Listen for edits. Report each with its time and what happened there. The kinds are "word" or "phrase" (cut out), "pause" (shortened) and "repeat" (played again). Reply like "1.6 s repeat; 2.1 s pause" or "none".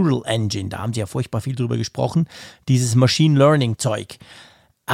none